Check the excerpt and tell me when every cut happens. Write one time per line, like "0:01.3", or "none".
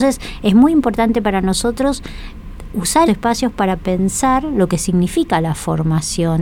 0:03.1